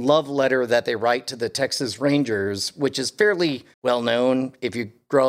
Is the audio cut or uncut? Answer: cut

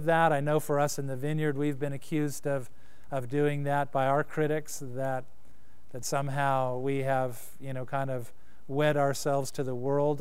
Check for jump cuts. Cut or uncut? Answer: uncut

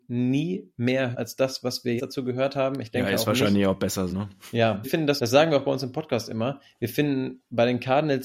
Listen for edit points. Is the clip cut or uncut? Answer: cut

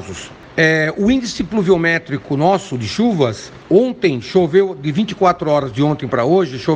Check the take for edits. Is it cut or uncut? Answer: uncut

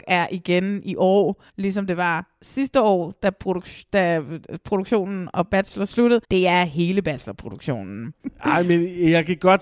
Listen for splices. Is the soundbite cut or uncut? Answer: cut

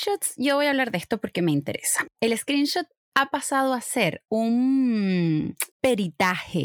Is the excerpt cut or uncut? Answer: cut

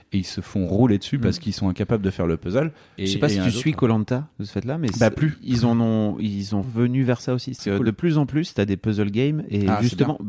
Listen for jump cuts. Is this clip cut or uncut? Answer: cut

